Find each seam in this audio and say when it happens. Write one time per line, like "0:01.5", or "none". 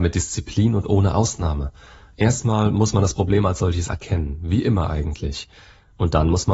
none

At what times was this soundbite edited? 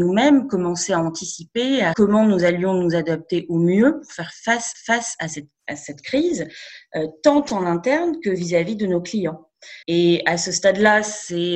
0:01.9
0:04.7
0:05.6
0:09.8

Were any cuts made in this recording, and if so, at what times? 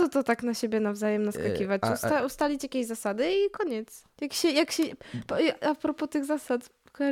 0:04.1

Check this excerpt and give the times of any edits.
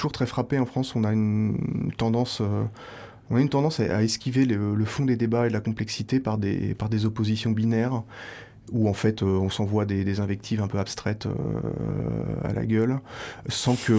none

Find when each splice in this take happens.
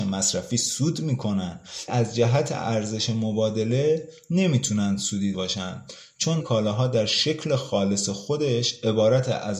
0:01.9
0:05.3
0:06.4

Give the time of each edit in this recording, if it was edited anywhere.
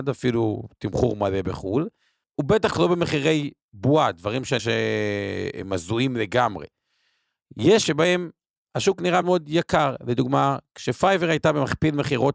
0:02.2
0:02.7
0:04.6
0:07.8
0:09.2

